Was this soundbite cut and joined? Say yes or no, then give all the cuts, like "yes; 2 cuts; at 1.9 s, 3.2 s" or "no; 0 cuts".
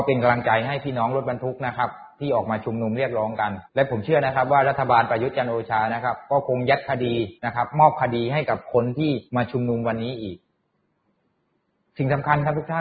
yes; 3 cuts; at 3.7 s, 7.4 s, 9.3 s